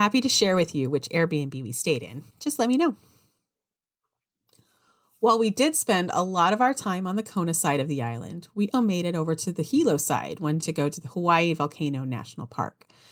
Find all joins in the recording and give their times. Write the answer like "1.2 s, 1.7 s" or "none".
2.3 s, 8.7 s, 10.6 s

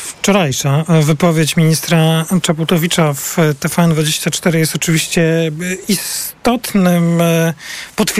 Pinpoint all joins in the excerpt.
none

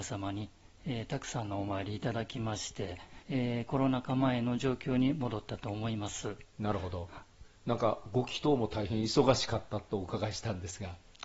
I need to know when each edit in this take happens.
3.2 s, 7.6 s

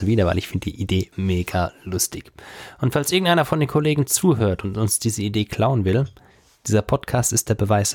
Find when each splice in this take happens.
1.1 s

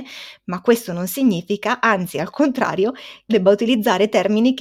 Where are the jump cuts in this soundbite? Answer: 3.3 s

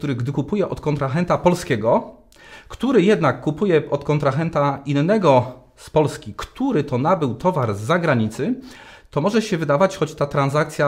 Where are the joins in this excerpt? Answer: none

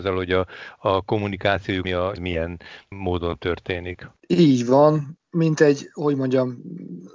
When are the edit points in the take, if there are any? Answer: 1.8 s, 2.2 s, 4.2 s, 5.2 s

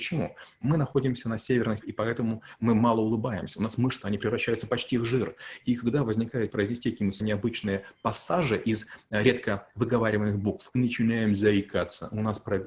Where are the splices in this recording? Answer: 1.8 s, 4.0 s, 6.5 s, 7.2 s, 10.7 s

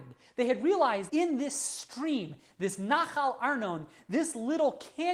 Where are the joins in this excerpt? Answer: 1.1 s

